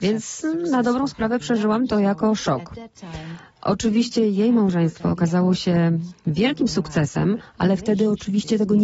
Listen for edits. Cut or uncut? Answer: uncut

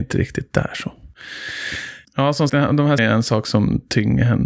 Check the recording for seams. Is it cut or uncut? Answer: cut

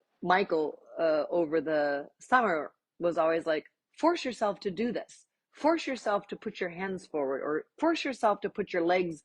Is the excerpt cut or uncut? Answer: uncut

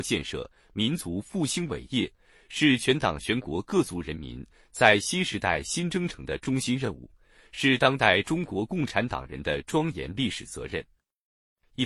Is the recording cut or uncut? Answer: uncut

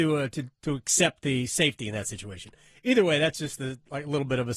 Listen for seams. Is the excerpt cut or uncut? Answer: uncut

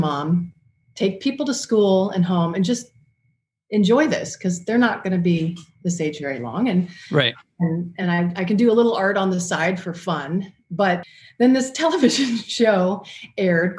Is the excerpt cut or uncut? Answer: uncut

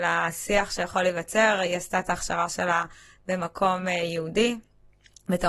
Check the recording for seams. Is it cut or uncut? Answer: uncut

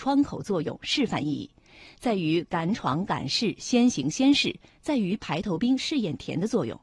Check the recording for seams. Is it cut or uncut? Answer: uncut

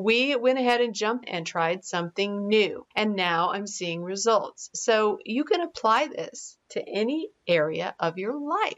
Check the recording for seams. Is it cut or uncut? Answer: cut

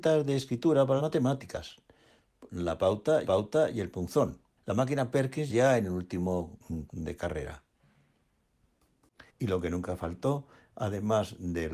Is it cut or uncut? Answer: cut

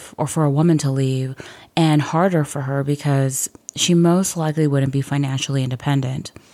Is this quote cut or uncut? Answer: uncut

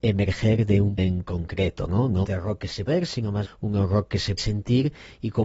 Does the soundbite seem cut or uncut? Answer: cut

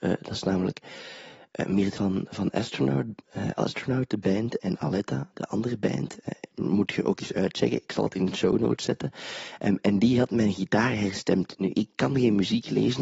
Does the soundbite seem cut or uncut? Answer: cut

